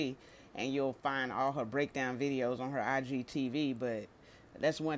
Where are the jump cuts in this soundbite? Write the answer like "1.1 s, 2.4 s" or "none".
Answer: none

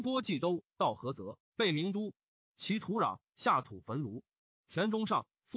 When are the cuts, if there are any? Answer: none

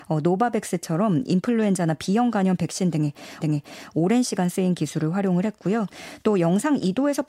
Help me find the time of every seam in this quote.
3.4 s

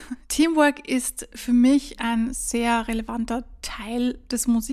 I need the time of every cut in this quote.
none

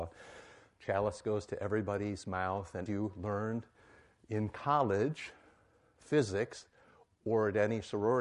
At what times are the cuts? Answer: 2.9 s

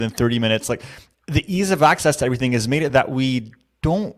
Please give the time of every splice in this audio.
none

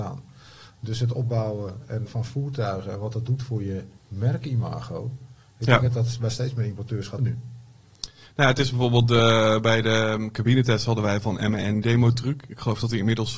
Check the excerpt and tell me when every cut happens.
2.1 s, 4.0 s, 7.2 s, 11.8 s

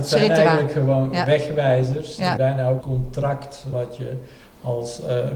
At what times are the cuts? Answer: 2.4 s, 2.8 s, 3.7 s

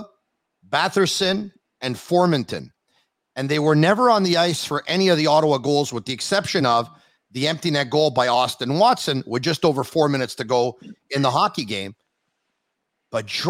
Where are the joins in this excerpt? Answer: none

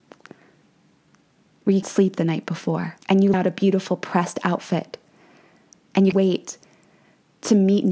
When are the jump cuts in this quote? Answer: 1.8 s, 3.0 s, 3.3 s, 6.1 s

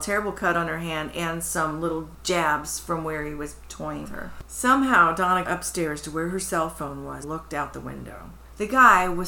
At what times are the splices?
4.0 s, 5.5 s, 7.2 s

